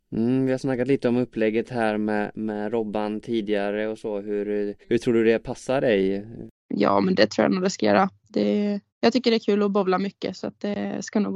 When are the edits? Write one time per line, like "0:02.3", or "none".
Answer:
0:04.8
0:08.9